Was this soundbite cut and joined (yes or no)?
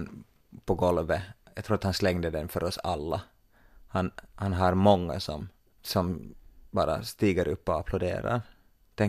no